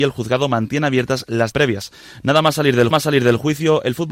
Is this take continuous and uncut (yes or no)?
no